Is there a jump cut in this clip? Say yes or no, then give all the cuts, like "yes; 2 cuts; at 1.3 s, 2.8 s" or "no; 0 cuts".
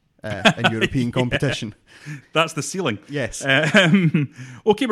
no; 0 cuts